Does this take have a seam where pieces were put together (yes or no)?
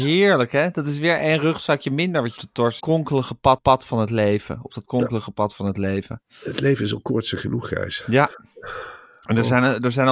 yes